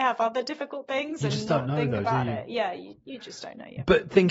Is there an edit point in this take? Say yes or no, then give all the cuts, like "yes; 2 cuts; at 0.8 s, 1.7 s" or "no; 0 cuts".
no; 0 cuts